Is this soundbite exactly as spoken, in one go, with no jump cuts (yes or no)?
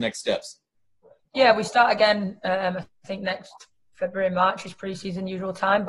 yes